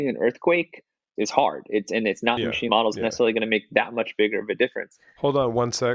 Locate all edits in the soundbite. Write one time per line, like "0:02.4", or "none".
0:02.4
0:02.7